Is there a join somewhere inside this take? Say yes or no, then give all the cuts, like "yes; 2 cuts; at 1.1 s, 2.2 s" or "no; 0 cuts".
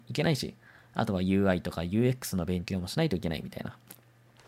no; 0 cuts